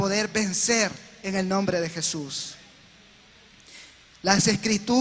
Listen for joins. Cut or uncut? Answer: uncut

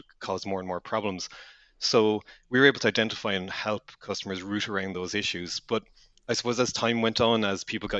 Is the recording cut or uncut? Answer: uncut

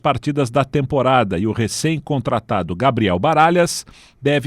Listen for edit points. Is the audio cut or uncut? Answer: uncut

